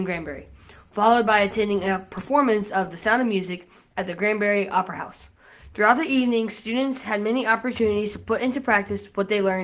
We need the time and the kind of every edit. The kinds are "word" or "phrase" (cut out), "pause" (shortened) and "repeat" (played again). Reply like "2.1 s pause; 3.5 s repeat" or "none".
none